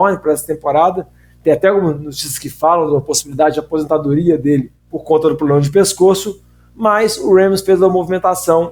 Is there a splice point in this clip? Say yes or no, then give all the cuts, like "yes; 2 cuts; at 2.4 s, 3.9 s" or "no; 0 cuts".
yes; 1 cut; at 4.8 s